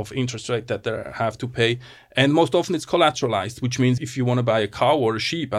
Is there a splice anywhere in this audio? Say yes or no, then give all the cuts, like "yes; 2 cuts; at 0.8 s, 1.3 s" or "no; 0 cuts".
yes; 1 cut; at 4.0 s